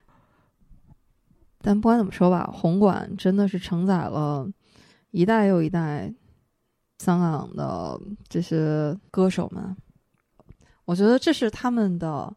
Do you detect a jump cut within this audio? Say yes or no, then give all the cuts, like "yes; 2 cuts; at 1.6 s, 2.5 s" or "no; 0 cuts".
no; 0 cuts